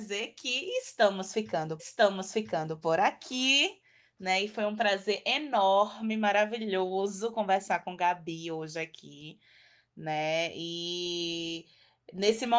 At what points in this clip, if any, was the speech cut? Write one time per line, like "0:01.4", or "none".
0:01.8